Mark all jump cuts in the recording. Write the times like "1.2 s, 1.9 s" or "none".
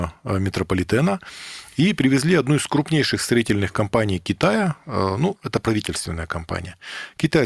none

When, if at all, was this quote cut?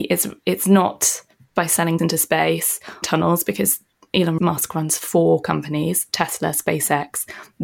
2.0 s, 3.0 s

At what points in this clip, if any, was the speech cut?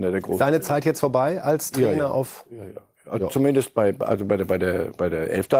none

